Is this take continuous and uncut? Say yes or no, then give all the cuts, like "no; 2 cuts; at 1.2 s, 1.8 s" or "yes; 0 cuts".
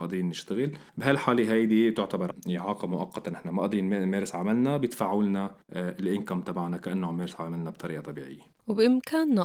yes; 0 cuts